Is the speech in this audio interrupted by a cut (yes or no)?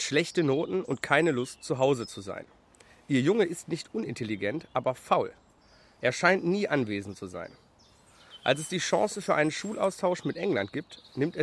no